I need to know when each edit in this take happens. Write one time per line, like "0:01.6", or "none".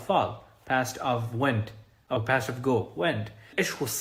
none